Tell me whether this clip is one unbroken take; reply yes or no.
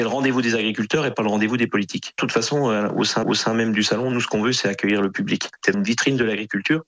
no